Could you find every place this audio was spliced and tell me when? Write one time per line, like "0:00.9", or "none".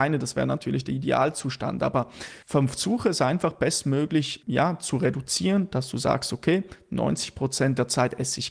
0:02.4
0:04.4